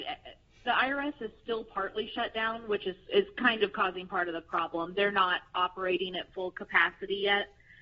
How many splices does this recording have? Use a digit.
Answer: 0